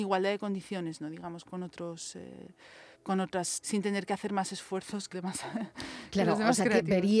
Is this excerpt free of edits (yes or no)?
no